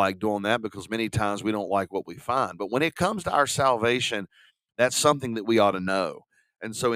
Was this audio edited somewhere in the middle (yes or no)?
no